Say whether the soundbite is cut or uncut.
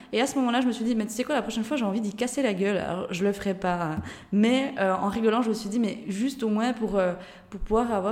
uncut